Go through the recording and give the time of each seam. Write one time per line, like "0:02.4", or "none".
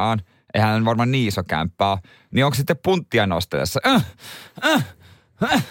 none